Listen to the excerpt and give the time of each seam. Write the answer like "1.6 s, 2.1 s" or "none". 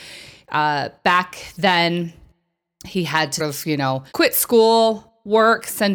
3.4 s, 4.1 s